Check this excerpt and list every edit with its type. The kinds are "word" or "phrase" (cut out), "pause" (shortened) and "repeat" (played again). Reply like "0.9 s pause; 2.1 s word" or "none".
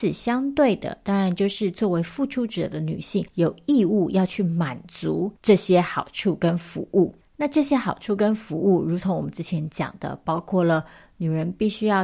3.3 s pause